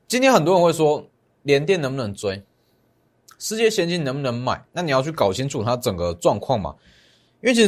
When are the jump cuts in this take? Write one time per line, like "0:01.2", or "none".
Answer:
0:04.7